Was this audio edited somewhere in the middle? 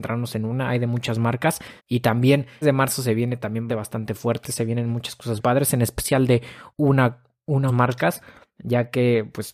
yes; 6 cuts; at 1.8 s, 2.6 s, 3.7 s, 5.4 s, 6.7 s, 7.7 s

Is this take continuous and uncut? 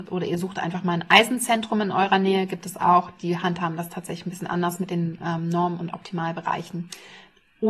yes; 0 cuts

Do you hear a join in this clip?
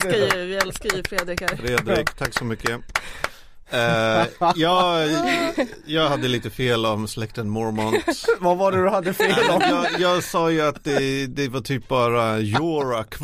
no; 0 cuts

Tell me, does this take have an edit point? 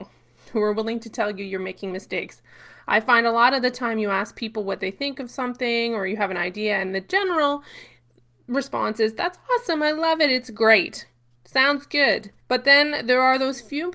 yes; 1 cut; at 12.4 s

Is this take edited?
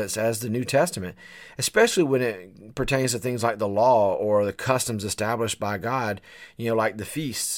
no; 0 cuts

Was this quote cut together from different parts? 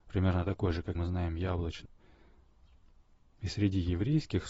yes; 2 cuts; at 0.9 s, 1.8 s

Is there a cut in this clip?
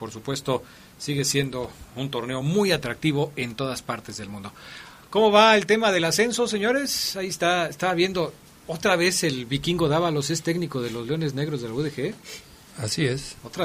no; 0 cuts

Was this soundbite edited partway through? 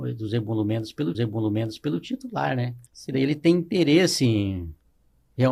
yes; 2 cuts; at 1.1 s, 2.9 s

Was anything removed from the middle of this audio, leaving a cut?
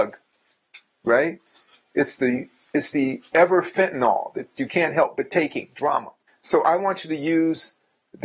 yes; 2 cuts; at 4.7 s, 6.3 s

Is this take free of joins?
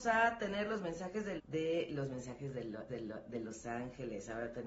no; 2 cuts; at 1.4 s, 2.9 s

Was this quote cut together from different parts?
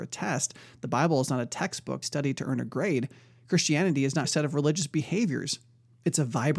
yes; 2 cuts; at 2.0 s, 4.2 s

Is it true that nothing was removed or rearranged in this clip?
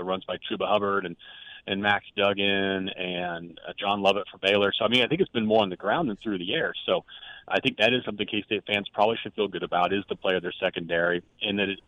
yes; 0 cuts

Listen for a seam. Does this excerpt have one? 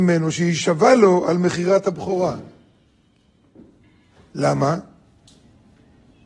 no; 0 cuts

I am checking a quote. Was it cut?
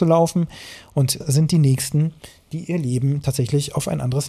yes; 1 cut; at 1.2 s

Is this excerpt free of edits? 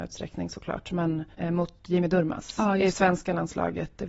no; 1 cut; at 1.3 s

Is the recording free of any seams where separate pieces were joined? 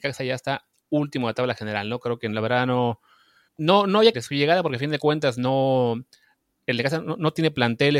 no; 2 cuts; at 3.5 s, 4.1 s

